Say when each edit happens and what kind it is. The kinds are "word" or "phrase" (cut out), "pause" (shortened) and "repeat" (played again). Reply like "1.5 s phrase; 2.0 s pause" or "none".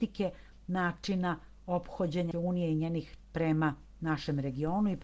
2.3 s word; 3.2 s word